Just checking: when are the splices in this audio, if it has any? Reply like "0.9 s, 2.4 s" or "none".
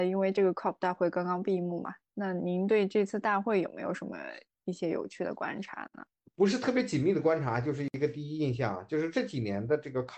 6.1 s